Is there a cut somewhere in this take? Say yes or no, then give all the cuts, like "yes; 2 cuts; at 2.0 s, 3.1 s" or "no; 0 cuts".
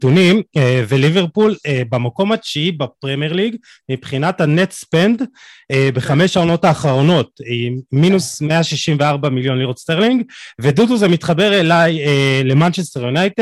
no; 0 cuts